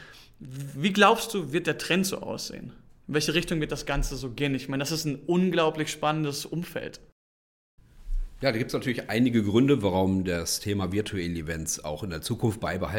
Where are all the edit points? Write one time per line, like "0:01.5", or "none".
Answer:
none